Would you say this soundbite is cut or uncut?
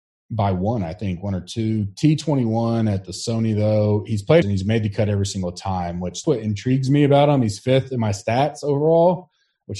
cut